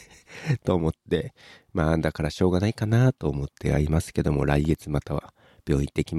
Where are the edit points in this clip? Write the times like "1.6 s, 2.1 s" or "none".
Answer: none